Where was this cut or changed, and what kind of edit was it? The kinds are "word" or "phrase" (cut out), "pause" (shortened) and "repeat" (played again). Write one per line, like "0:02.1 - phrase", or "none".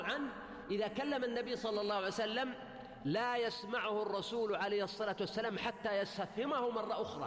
none